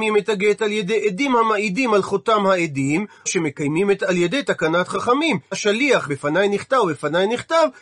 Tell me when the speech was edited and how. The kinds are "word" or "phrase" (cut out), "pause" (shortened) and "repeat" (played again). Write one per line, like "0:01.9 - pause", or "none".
0:03.3 - word
0:04.0 - word
0:05.5 - word
0:06.1 - word